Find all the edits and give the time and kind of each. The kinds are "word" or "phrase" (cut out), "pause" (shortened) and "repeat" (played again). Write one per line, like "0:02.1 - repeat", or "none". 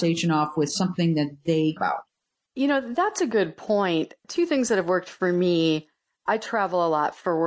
0:01.8 - word
0:04.2 - pause

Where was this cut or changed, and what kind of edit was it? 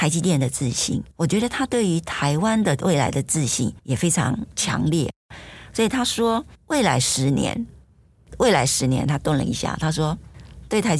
0:01.1 - pause
0:03.8 - pause
0:06.5 - pause

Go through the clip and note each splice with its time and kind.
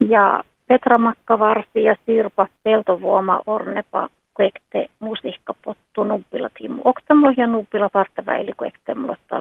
0:02.6 - pause
0:04.2 - pause

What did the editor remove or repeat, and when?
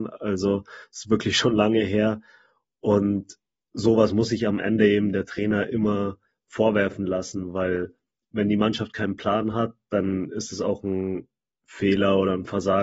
none

